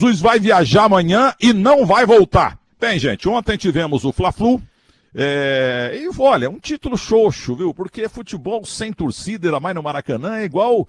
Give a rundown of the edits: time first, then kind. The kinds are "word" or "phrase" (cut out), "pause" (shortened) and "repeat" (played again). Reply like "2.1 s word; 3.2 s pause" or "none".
none